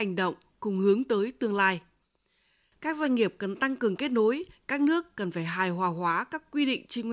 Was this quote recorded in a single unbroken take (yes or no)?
yes